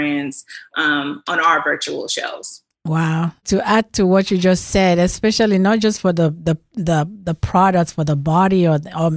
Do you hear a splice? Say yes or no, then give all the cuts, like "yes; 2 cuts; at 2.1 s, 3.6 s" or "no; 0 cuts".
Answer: no; 0 cuts